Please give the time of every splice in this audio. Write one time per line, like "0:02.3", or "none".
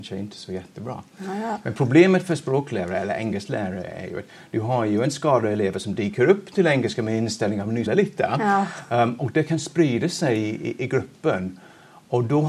0:07.9